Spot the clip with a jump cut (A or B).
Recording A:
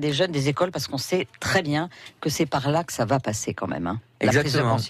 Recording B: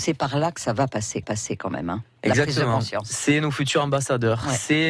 B